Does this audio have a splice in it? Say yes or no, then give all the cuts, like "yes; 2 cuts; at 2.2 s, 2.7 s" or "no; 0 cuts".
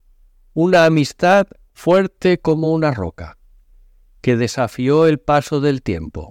no; 0 cuts